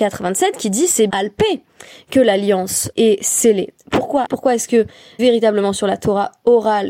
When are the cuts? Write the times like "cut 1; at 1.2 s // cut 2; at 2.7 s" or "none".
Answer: cut 1; at 1.1 s // cut 2; at 2.9 s // cut 3; at 4.2 s // cut 4; at 5.2 s